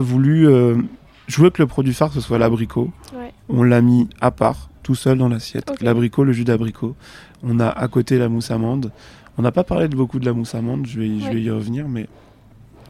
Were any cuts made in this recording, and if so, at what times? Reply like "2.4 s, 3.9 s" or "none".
none